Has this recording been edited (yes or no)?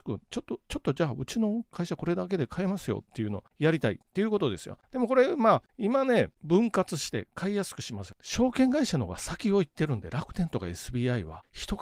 no